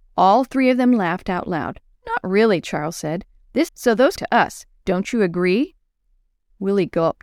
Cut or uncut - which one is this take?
cut